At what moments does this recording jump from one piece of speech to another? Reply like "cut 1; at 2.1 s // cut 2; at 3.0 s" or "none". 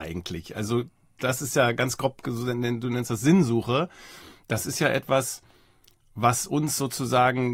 none